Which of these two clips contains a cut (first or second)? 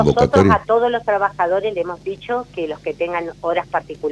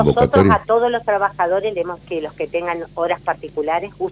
second